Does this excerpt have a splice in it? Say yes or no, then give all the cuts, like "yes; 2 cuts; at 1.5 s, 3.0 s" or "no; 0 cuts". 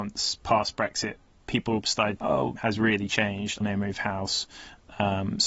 yes; 4 cuts; at 1.5 s, 2.2 s, 2.6 s, 3.6 s